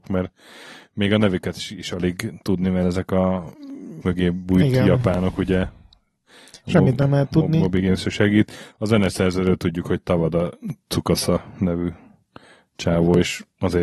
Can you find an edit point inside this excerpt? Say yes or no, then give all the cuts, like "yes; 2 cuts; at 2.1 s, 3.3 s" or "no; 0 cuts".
yes; 1 cut; at 4.0 s